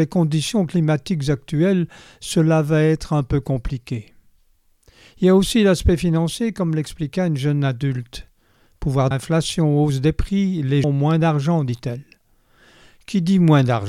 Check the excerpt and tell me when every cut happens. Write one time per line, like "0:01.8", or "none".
0:09.1
0:10.8

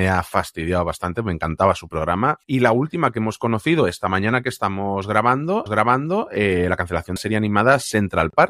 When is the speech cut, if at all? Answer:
0:02.4
0:05.7
0:07.2

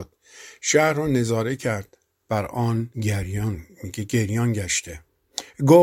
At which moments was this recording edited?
0:02.9

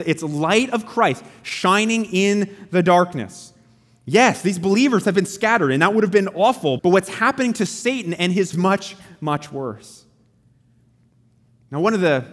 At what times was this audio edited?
0:06.8
0:08.5

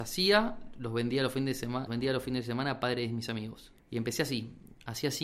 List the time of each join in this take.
0:01.9
0:03.8

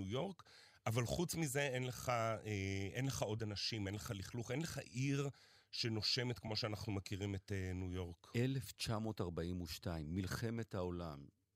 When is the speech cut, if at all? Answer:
none

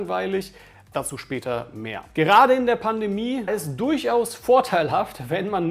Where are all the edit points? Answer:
0:00.9
0:03.5

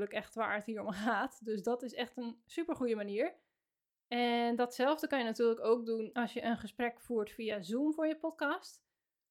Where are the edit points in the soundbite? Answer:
none

